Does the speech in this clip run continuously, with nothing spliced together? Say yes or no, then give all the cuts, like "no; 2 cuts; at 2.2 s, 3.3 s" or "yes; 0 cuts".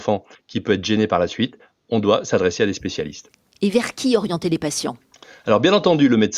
yes; 0 cuts